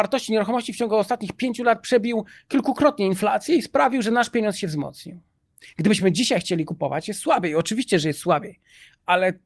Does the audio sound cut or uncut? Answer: uncut